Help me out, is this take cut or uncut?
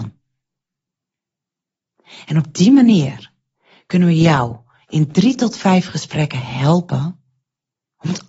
uncut